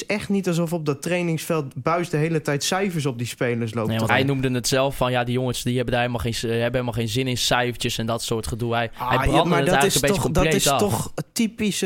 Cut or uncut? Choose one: cut